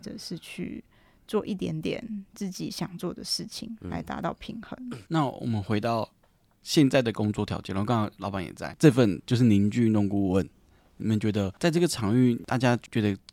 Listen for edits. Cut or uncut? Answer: uncut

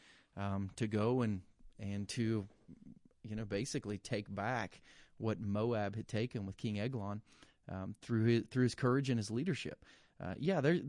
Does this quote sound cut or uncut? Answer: uncut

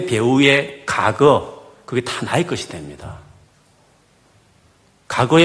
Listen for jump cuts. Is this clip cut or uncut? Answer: uncut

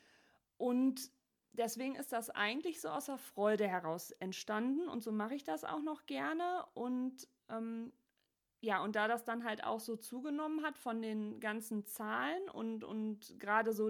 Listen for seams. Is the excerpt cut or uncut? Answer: uncut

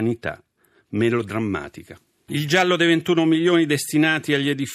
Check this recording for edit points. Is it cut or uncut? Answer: uncut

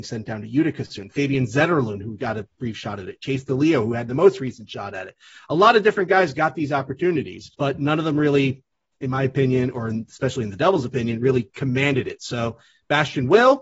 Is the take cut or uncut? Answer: cut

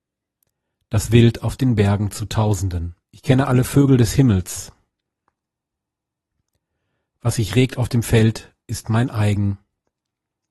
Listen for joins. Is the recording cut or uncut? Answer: cut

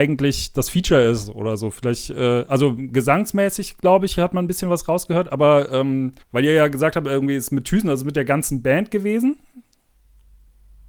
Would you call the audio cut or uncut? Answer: cut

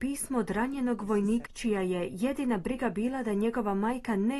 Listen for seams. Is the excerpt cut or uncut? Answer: cut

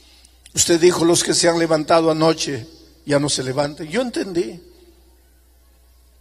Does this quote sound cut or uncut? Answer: uncut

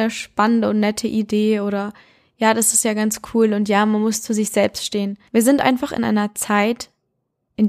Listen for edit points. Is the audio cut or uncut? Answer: uncut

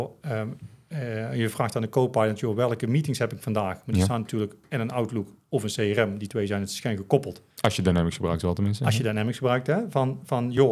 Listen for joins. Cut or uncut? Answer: cut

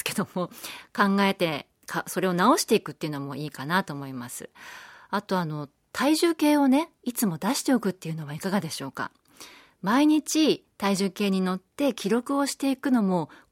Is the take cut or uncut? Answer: uncut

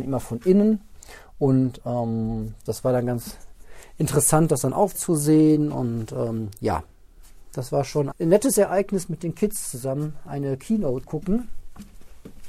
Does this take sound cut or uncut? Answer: cut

